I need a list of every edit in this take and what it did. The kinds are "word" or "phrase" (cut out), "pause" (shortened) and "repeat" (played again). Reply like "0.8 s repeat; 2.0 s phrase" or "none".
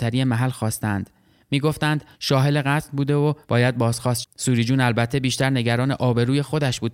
2.1 s pause; 3.4 s pause; 4.2 s word